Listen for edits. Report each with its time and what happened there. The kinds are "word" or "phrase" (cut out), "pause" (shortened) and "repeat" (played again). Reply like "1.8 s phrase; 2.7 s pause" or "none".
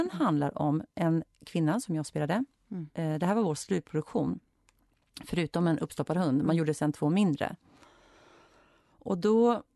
none